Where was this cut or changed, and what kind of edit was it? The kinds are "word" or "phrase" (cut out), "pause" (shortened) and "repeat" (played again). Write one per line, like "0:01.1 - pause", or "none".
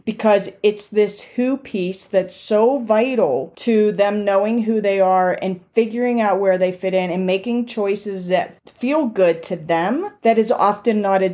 none